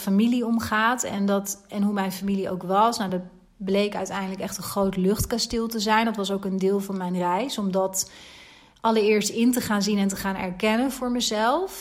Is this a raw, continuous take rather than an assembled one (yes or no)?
yes